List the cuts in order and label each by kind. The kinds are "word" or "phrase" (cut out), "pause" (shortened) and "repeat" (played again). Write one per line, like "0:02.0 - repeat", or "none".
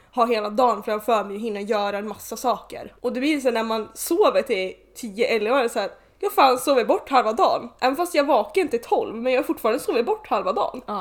none